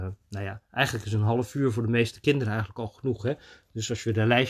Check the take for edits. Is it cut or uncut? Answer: uncut